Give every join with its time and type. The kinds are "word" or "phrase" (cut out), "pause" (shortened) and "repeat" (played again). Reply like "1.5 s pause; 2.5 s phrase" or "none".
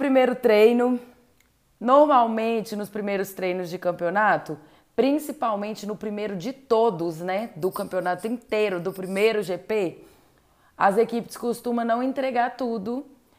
none